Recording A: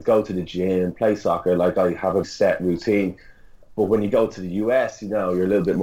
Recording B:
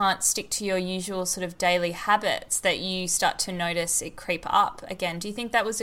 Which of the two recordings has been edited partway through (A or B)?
A